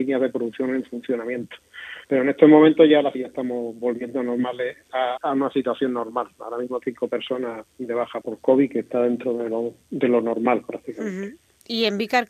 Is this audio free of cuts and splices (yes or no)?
no